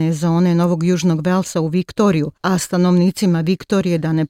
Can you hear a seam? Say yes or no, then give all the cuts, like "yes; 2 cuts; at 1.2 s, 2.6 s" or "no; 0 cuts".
yes; 1 cut; at 2.4 s